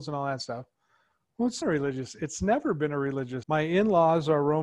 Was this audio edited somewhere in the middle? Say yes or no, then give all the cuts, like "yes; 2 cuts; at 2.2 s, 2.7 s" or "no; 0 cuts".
yes; 2 cuts; at 1.6 s, 3.4 s